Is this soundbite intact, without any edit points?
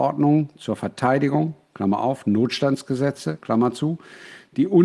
yes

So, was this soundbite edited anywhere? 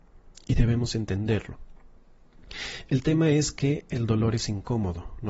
no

